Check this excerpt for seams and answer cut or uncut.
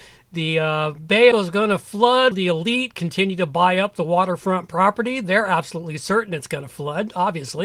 cut